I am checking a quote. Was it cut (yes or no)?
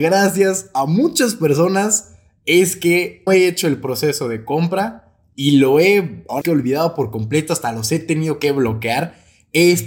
yes